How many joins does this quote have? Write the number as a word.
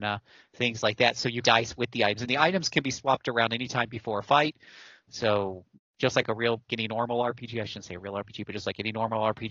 three